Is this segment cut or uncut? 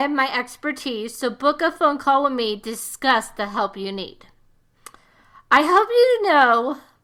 uncut